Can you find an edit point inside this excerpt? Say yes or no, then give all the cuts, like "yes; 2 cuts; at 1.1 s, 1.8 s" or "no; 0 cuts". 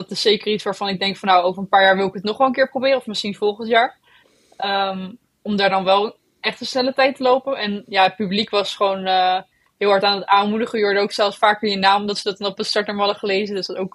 no; 0 cuts